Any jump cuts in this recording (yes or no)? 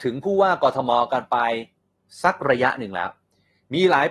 no